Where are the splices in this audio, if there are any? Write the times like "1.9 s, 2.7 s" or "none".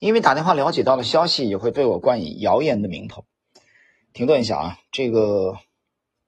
none